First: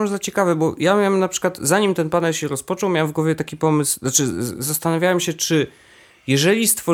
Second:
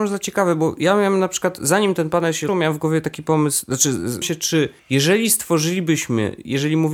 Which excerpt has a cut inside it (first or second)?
second